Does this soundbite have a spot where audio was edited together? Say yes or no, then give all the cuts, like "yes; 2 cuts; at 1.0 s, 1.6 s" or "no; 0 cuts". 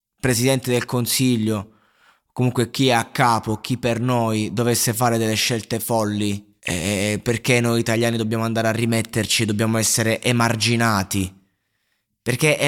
yes; 1 cut; at 6.6 s